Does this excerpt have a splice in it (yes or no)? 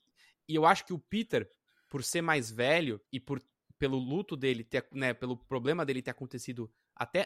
yes